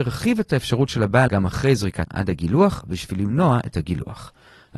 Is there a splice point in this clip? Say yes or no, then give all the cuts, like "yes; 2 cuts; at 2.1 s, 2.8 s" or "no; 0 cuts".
yes; 2 cuts; at 1.3 s, 2.1 s